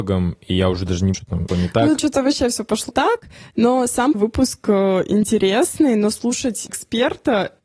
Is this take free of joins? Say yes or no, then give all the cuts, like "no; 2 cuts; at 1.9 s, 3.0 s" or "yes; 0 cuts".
no; 6 cuts; at 1.1 s, 1.5 s, 2.0 s, 2.9 s, 4.1 s, 6.7 s